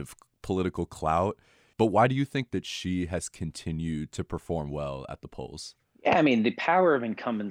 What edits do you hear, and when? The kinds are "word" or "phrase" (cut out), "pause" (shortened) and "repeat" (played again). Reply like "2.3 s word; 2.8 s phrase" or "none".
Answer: 5.8 s pause